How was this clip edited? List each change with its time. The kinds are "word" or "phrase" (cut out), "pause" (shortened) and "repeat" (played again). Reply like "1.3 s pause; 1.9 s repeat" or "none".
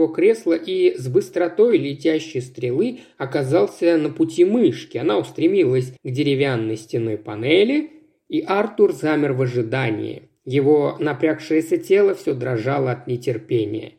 6.0 s pause